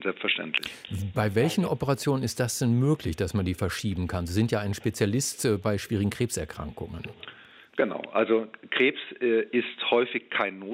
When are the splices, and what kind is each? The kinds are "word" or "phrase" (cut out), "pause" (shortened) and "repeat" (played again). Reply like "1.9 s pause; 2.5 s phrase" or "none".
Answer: none